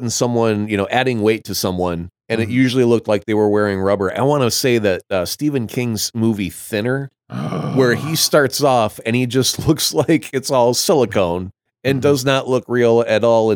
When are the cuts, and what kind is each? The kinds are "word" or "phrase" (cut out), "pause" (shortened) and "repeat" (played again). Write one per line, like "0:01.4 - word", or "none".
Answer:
0:02.2 - pause
0:07.2 - pause
0:11.7 - pause